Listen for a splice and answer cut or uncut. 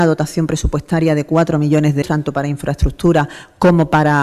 cut